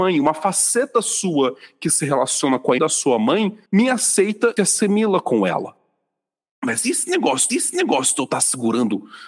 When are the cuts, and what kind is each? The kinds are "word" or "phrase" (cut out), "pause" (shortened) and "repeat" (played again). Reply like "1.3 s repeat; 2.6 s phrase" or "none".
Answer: 2.8 s word; 3.7 s pause; 4.6 s phrase; 7.5 s repeat